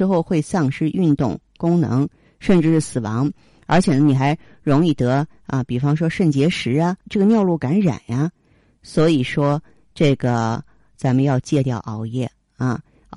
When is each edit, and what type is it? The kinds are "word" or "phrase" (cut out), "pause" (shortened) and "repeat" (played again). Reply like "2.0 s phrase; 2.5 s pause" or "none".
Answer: 7.0 s word